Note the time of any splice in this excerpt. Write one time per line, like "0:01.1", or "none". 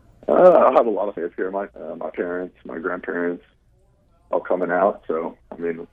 0:01.2
0:01.7
0:04.3